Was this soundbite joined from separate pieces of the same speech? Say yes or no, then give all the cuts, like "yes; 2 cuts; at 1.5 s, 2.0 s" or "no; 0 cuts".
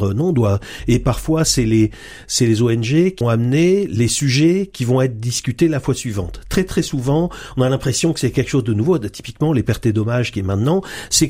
yes; 1 cut; at 3.2 s